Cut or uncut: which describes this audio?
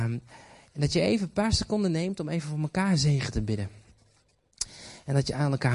uncut